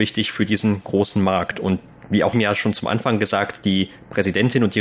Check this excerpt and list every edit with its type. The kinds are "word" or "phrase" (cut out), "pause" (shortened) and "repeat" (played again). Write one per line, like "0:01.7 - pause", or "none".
0:02.3 - word